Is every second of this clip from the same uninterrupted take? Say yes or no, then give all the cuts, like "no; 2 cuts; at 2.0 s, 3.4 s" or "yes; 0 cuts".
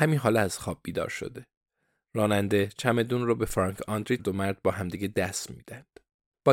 no; 1 cut; at 4.2 s